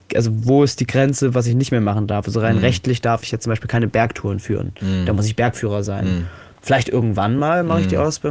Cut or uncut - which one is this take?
uncut